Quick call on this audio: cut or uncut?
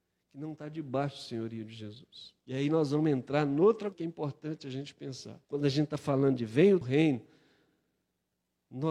cut